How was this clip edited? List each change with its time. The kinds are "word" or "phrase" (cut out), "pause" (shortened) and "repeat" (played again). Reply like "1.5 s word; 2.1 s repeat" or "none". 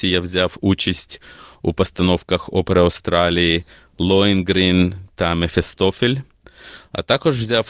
none

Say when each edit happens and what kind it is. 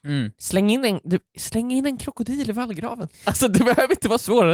3.1 s pause

